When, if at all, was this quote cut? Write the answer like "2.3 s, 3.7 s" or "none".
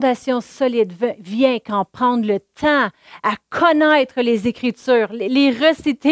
none